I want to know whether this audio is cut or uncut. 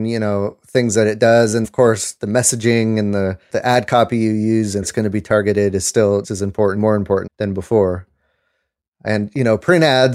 cut